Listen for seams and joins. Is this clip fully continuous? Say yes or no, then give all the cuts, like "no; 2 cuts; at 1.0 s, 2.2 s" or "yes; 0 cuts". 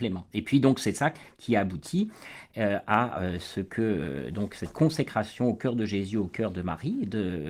yes; 0 cuts